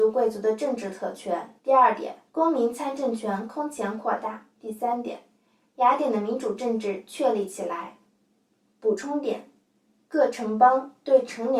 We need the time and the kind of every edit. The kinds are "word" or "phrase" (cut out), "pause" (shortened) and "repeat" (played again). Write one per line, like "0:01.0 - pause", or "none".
0:01.6 - pause
0:02.3 - pause
0:04.5 - pause
0:08.2 - pause